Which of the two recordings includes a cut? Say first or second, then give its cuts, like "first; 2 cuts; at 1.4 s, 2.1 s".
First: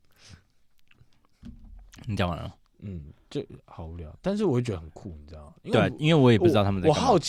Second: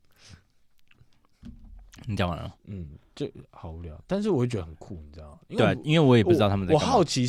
second; 1 cut; at 2.6 s